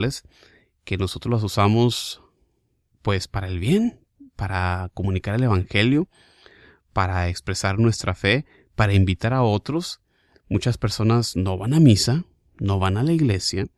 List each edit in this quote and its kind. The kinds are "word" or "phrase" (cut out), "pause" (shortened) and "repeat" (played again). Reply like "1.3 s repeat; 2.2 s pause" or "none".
none